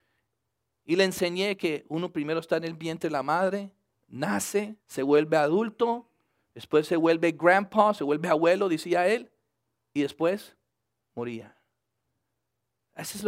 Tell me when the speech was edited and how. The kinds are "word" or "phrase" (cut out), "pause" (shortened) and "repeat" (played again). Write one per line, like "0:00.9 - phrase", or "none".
0:04.8 - pause